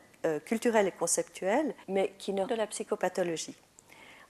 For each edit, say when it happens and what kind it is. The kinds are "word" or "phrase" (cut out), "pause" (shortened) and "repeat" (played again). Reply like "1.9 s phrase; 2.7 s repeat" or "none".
1.8 s pause; 2.5 s phrase